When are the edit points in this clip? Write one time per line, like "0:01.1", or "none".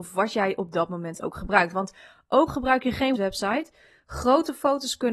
0:02.5
0:03.2